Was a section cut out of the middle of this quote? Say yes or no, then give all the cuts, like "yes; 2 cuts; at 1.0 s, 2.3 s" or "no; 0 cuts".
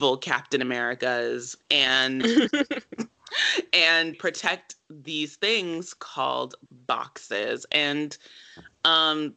yes; 3 cuts; at 1.6 s, 4.1 s, 6.7 s